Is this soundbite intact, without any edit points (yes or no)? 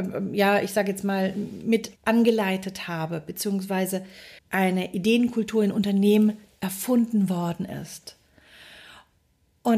no